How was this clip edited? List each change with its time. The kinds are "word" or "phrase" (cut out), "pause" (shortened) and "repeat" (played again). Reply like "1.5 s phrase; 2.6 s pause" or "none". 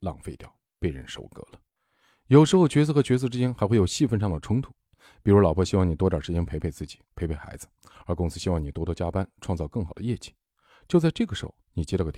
1.8 s pause